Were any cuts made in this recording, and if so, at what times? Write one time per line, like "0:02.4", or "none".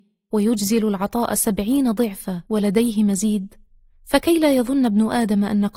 0:02.5

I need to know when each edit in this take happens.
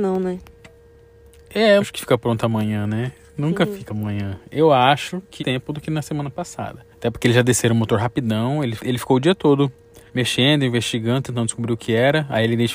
0:01.8
0:03.9
0:05.4
0:06.9
0:08.8
0:10.1

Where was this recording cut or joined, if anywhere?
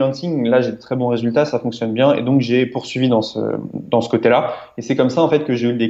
none

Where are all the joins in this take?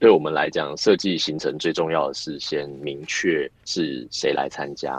0:03.6

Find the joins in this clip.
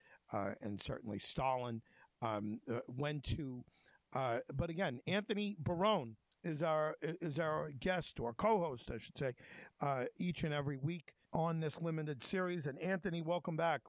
0:11.2

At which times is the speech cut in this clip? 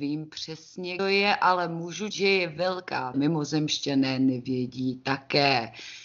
0:01.0
0:02.1
0:03.1

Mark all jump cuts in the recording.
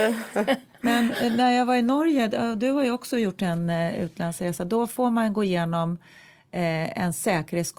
none

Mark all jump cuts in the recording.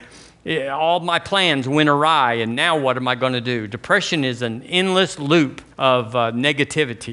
0:05.7

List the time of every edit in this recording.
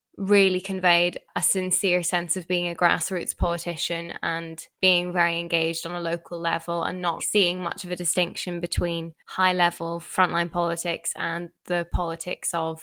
0:04.7
0:07.2
0:09.2

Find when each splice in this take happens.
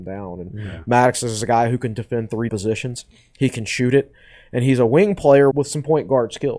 0:02.5
0:05.5

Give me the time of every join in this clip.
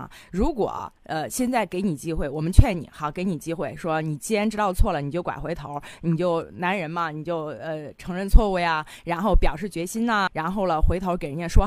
0:10.3

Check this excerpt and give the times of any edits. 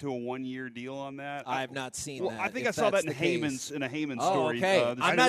none

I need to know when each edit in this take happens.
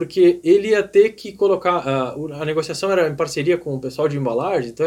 none

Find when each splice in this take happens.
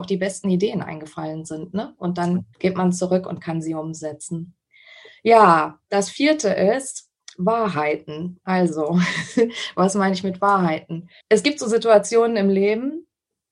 0:02.5
0:11.2

